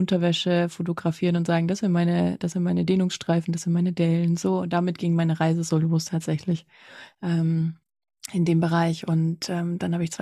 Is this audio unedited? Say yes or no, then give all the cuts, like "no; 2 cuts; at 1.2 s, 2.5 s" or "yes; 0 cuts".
yes; 0 cuts